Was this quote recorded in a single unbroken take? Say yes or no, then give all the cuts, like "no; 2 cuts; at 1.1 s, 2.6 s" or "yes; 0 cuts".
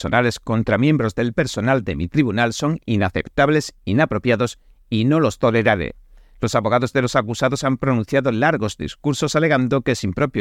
yes; 0 cuts